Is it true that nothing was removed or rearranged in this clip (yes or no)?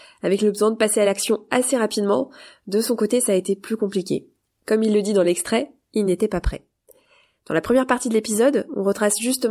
yes